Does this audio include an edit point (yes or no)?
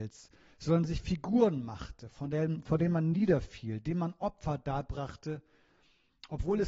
no